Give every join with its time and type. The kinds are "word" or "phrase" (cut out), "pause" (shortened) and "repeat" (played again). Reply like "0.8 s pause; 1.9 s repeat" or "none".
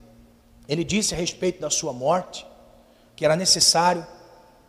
none

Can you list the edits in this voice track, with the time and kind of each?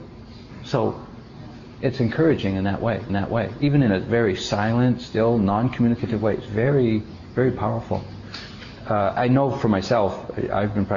3.1 s repeat; 9.2 s word

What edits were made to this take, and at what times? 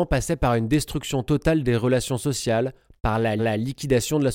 3.4 s repeat

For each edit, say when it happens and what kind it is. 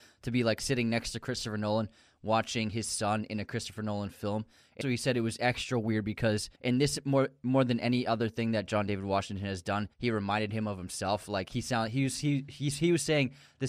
4.8 s word; 6.6 s pause; 9.9 s pause

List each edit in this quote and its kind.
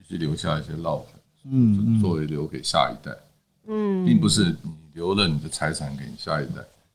none

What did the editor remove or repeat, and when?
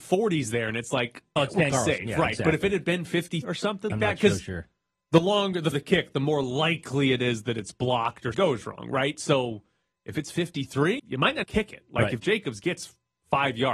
1.4 s word; 1.7 s word; 3.4 s word; 3.9 s word; 5.7 s word; 8.3 s word; 11.0 s word; 11.4 s word

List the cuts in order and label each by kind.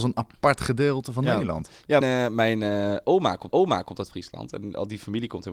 2.0 s word; 3.5 s repeat

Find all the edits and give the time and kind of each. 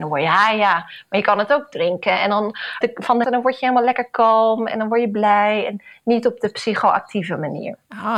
2.8 s word; 3.2 s word

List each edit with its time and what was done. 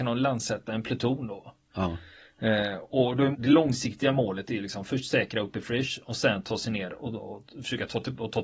3.3 s word

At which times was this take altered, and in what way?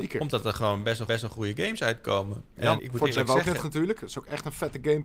1.1 s repeat; 2.8 s word; 3.2 s word; 3.6 s word

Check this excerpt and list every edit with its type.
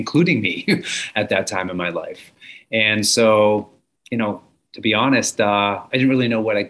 none

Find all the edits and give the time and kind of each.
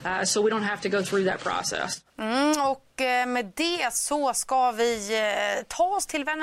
2.1 s pause

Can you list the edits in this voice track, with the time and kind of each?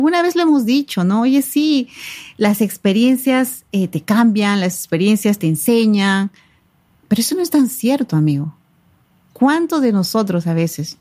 none

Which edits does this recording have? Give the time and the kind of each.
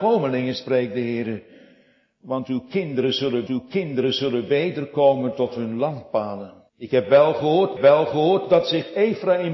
3.5 s repeat; 6.7 s pause; 7.8 s repeat

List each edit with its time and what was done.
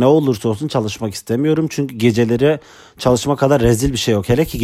none

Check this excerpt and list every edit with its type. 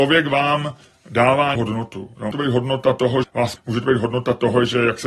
1.6 s word; 2.3 s word; 3.2 s word; 3.6 s word

